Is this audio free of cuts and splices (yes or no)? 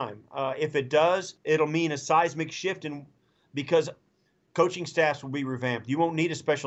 no